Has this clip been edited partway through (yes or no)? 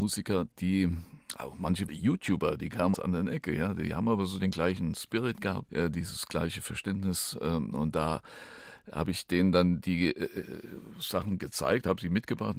yes